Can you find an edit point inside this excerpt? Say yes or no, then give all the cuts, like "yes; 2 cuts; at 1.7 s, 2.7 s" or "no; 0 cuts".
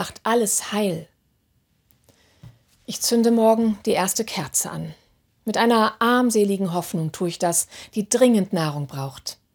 no; 0 cuts